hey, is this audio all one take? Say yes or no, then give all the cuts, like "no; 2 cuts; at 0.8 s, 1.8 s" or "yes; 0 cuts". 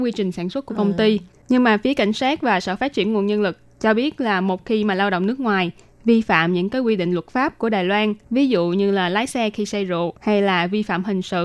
no; 2 cuts; at 8.2 s, 10.2 s